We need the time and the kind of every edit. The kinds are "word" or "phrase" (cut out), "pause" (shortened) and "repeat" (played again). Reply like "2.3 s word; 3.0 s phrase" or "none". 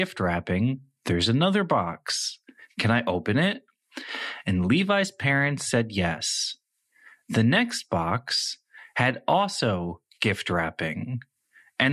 none